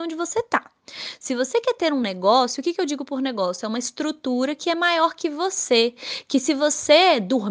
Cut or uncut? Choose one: uncut